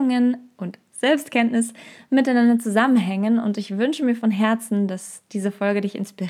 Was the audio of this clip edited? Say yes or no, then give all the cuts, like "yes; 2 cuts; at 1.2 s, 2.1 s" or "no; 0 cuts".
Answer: no; 0 cuts